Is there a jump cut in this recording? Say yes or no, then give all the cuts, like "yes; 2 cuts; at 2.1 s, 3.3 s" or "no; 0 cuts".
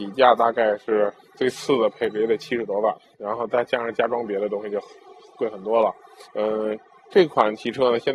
yes; 2 cuts; at 3.1 s, 6.2 s